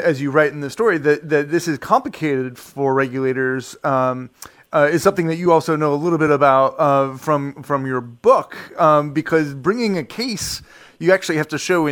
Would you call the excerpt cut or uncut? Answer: uncut